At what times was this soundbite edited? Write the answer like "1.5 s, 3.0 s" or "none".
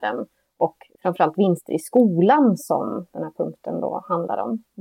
none

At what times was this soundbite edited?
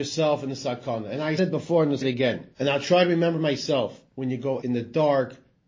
1.4 s, 2.0 s, 2.5 s, 4.1 s, 4.6 s

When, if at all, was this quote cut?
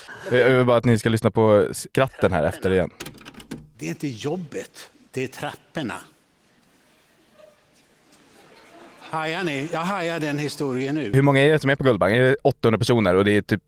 none

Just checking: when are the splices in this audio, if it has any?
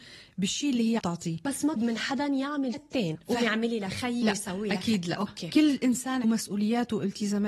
1.0 s, 1.8 s, 2.7 s, 3.1 s, 4.2 s, 6.2 s

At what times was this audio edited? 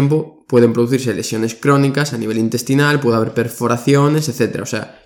none

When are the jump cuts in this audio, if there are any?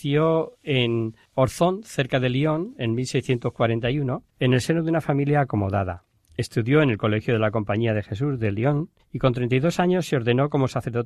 4.3 s, 9.0 s

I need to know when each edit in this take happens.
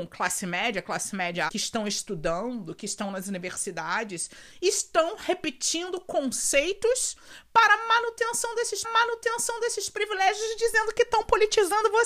1.5 s, 8.8 s

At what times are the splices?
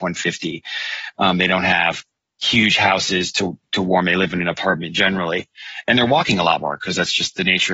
none

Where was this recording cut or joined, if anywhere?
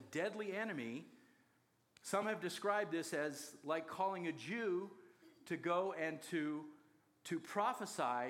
none

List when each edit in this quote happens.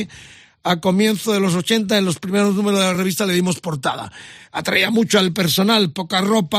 none

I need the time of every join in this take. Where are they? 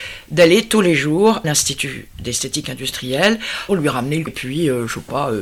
1.4 s, 3.7 s, 4.3 s

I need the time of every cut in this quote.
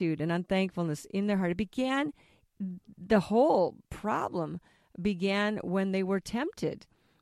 none

